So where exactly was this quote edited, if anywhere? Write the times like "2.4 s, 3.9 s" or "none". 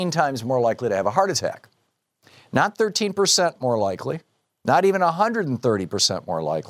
none